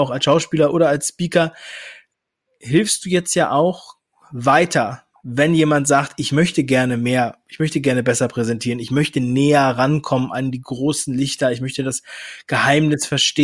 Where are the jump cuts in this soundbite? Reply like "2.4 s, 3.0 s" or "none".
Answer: none

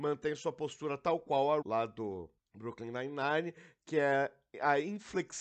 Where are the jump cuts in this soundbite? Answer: 1.6 s, 2.4 s

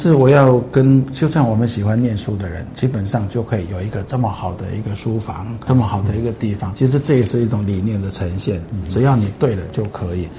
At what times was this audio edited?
5.7 s, 6.7 s

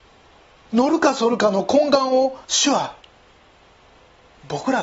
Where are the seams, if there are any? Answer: 2.4 s

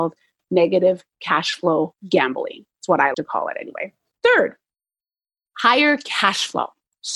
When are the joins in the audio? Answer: 3.1 s, 4.1 s

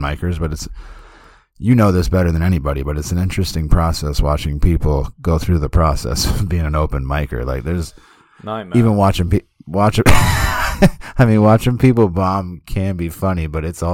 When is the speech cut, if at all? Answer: none

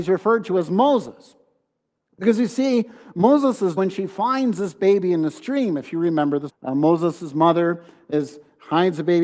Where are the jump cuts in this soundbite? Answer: 3.8 s, 6.5 s

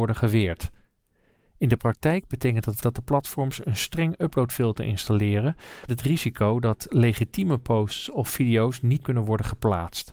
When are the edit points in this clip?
2.8 s, 5.9 s, 9.0 s

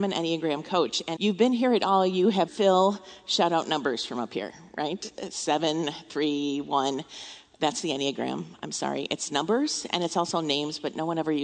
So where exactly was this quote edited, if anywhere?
1.2 s, 2.5 s

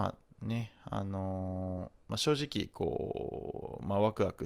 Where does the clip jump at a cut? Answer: 2.0 s

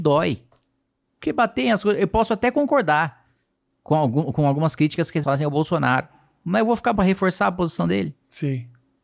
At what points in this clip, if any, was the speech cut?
5.2 s, 7.0 s

